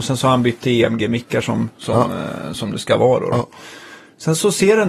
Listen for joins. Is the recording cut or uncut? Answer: uncut